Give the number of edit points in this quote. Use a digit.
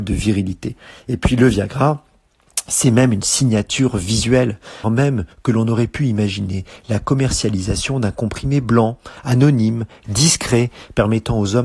1